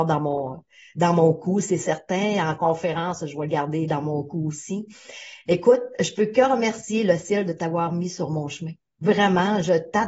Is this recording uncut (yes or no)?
yes